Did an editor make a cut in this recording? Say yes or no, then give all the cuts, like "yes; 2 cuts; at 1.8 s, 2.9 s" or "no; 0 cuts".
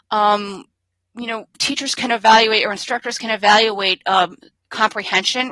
no; 0 cuts